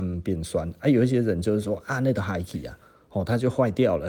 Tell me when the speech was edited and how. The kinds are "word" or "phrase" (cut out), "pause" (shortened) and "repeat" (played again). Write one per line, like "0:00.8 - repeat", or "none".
none